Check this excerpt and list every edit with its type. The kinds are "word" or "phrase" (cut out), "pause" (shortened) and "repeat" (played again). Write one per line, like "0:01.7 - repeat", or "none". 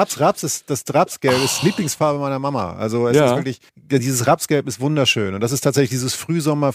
0:03.7 - pause